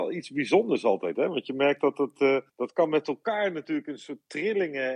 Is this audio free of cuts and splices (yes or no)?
no